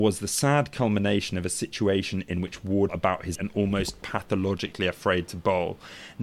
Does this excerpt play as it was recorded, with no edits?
no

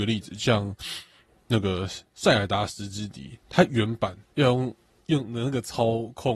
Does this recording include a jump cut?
yes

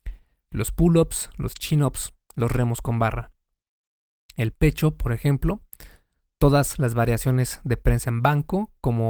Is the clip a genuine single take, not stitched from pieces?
yes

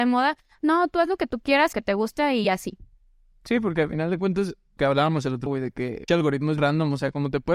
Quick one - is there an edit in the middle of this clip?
yes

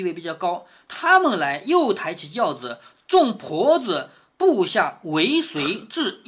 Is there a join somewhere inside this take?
no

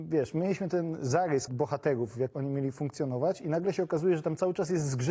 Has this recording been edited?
yes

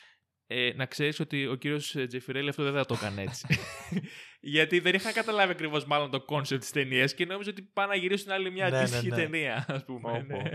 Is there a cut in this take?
no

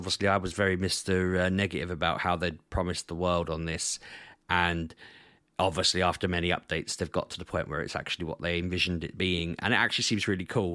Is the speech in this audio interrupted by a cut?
no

